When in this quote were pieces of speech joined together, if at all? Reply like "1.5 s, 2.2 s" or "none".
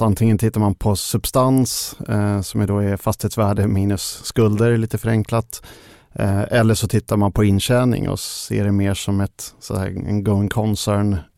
none